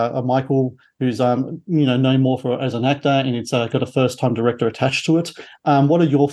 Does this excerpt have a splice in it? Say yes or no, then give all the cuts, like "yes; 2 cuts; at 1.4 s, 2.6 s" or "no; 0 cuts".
no; 0 cuts